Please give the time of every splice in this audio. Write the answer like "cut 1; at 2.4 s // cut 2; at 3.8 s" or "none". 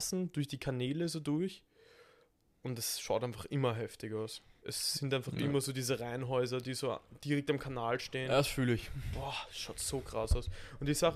none